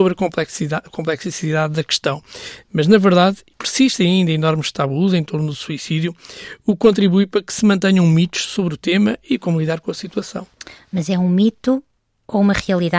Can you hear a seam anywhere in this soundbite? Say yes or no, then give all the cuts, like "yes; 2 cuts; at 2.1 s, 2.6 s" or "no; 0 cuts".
no; 0 cuts